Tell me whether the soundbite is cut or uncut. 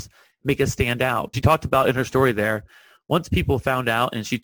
cut